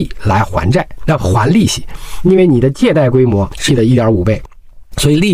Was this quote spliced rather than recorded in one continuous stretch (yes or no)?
yes